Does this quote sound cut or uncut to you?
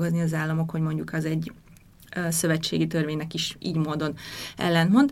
uncut